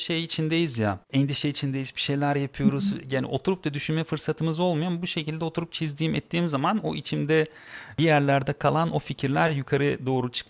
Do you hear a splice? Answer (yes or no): yes